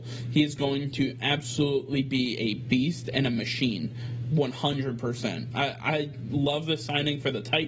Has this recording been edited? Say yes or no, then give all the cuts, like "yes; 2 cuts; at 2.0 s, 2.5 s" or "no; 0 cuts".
no; 0 cuts